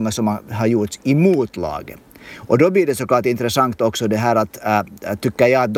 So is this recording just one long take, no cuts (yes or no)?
yes